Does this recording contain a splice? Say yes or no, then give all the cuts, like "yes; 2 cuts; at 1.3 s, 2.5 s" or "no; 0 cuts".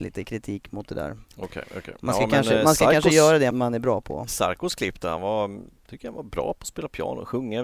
yes; 1 cut; at 3.5 s